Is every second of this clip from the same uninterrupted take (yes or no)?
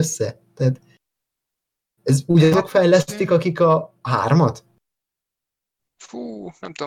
yes